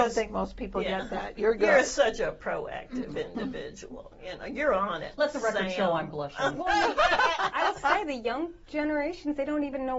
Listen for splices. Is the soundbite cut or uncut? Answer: uncut